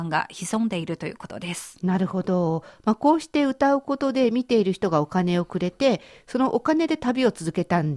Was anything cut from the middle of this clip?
no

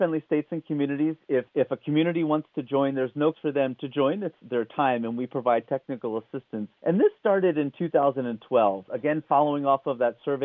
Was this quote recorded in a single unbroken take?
no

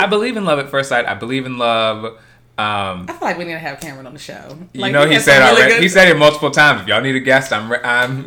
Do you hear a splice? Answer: no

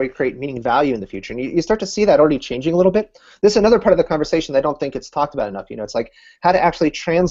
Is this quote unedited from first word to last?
yes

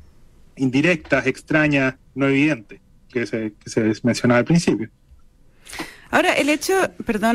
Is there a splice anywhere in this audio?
yes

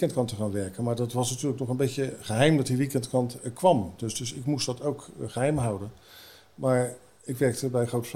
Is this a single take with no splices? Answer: yes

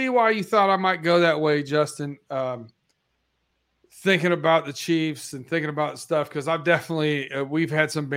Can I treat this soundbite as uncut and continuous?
yes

